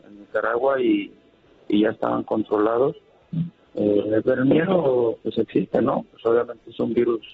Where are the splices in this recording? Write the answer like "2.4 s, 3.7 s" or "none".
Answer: 4.2 s